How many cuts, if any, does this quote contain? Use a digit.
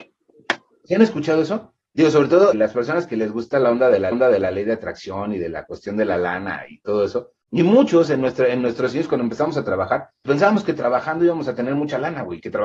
4